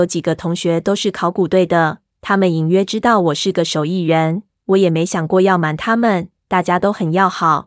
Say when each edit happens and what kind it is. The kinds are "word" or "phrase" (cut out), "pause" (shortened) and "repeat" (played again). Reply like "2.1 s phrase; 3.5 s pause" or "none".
none